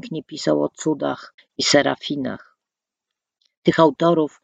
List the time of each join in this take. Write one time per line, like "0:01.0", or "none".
0:01.4

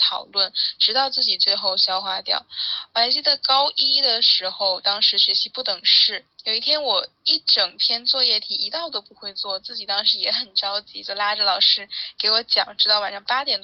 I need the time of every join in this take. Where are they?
0:06.3

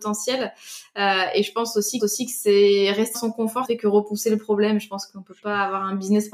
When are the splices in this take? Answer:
0:02.0
0:03.1
0:03.6

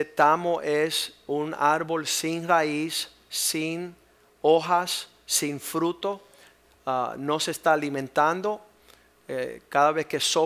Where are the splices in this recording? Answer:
none

